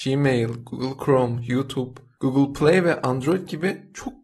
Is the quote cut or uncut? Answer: uncut